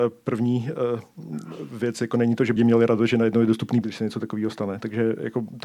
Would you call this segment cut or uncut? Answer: cut